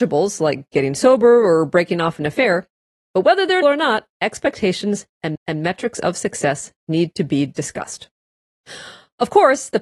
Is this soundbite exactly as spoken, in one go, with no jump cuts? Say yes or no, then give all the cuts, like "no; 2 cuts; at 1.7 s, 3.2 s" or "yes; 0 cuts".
no; 3 cuts; at 3.6 s, 4.1 s, 5.3 s